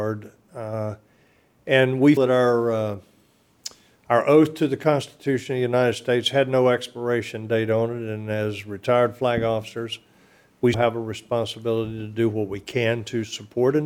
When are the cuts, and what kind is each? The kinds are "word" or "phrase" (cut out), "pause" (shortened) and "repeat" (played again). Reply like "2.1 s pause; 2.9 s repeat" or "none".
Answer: 2.2 s word; 10.7 s word